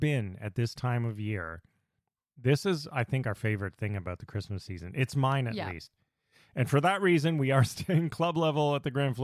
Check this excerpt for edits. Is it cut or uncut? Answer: uncut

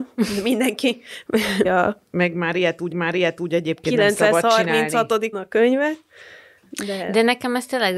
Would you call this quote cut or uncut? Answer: cut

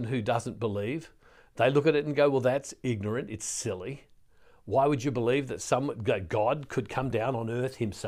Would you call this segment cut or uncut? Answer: uncut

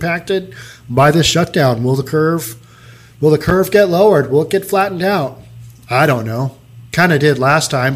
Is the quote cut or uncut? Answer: uncut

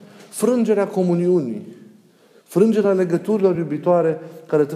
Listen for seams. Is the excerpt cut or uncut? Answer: uncut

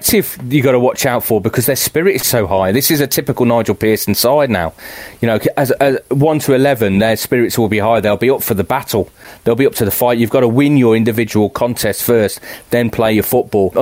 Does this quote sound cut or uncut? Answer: uncut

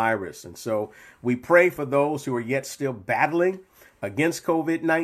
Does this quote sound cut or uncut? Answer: uncut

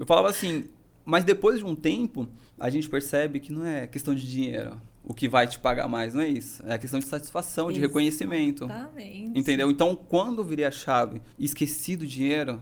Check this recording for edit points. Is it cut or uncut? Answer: cut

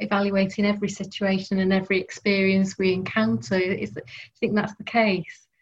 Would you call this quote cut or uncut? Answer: uncut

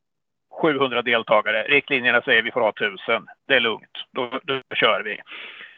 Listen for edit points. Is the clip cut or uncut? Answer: cut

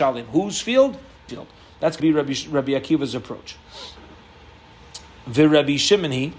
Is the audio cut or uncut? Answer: cut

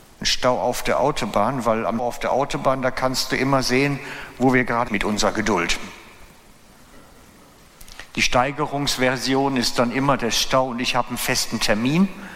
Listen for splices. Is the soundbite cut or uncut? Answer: cut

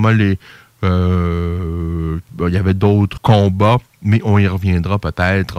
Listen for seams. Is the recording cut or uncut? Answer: cut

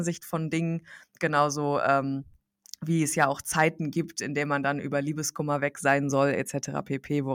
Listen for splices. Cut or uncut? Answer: uncut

